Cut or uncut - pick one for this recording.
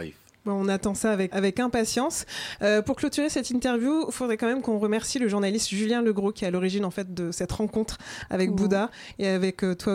cut